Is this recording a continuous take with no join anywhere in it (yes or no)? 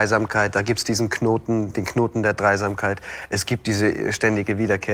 yes